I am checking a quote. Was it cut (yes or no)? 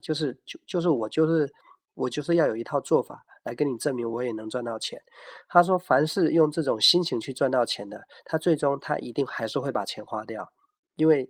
no